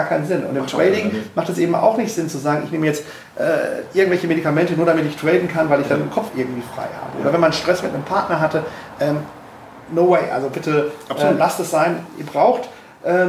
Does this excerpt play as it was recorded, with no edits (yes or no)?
yes